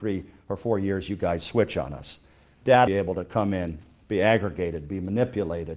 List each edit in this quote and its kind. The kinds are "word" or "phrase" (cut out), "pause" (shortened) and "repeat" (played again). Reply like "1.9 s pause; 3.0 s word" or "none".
2.9 s phrase